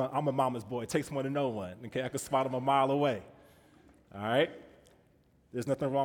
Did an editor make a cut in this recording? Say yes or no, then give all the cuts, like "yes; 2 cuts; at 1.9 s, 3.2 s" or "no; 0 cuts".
no; 0 cuts